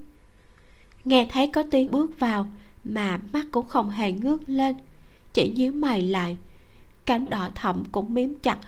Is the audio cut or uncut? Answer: cut